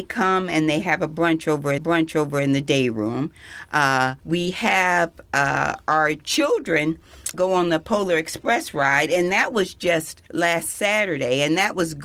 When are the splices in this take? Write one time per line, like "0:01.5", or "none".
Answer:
0:01.8
0:04.2
0:07.3
0:10.3